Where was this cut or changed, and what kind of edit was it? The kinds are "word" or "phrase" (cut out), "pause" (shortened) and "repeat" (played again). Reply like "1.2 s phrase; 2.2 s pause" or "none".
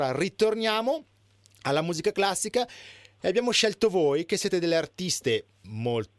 none